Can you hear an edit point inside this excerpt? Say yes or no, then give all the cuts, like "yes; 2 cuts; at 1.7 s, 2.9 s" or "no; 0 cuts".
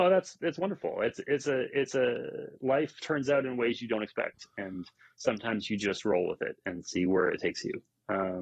no; 0 cuts